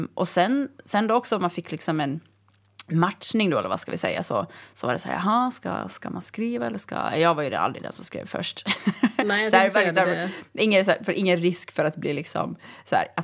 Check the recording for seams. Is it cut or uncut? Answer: uncut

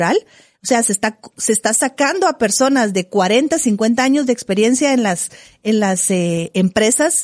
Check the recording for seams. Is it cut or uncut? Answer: uncut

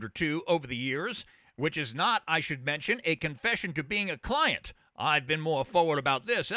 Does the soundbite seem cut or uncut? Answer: uncut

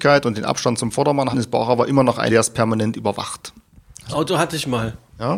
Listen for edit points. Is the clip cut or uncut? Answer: cut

